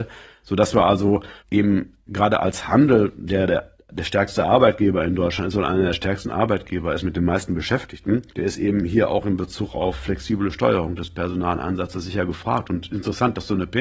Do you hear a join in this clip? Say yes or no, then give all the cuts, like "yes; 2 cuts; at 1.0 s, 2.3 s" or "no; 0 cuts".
yes; 2 cuts; at 1.4 s, 8.3 s